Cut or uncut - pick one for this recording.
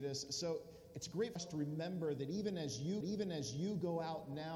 cut